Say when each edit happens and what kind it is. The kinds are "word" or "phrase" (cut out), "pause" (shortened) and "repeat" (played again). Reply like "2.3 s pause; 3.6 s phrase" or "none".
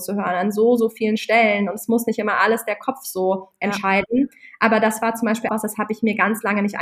5.5 s word